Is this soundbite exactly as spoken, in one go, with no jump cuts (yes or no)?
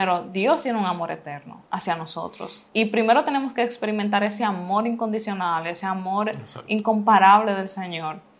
no